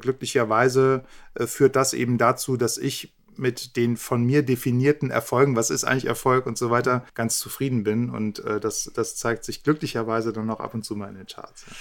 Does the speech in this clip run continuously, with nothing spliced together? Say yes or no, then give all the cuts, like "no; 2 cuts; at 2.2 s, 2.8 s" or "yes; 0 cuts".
no; 1 cut; at 7.1 s